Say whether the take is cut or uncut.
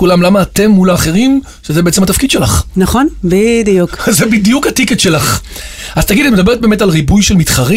uncut